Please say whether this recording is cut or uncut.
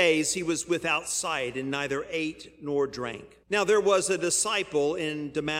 cut